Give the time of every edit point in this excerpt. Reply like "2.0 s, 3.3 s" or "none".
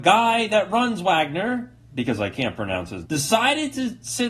3.0 s